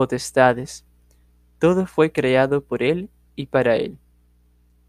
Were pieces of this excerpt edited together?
no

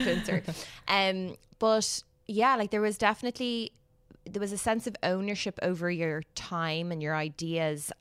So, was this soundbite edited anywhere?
no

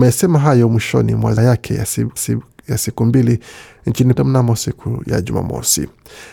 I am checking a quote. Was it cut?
yes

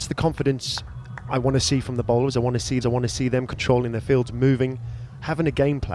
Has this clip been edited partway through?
yes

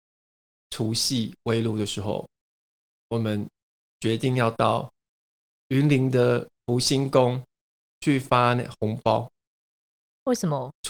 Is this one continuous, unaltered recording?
yes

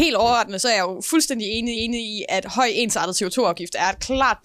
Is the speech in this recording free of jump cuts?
no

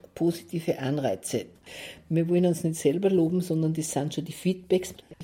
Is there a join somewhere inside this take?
no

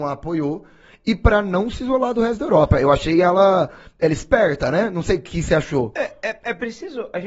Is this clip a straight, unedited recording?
yes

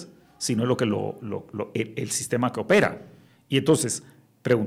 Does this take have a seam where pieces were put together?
no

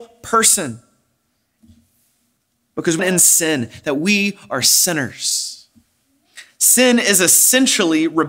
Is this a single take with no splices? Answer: no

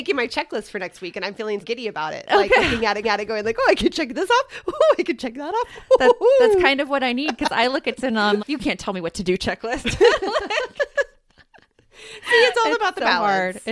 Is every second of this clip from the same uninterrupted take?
no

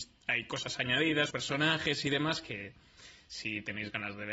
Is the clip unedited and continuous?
no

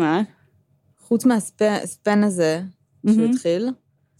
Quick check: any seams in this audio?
no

